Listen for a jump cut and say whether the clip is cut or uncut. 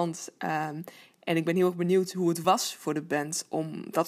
uncut